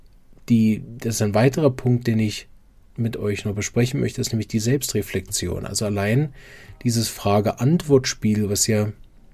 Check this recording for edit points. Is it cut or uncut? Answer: uncut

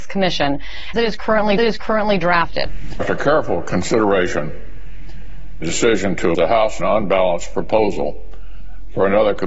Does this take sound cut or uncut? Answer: cut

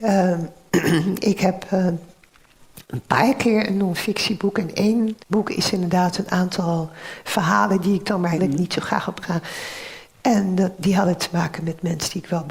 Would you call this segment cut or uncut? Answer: cut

